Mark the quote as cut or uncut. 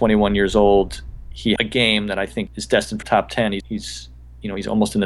cut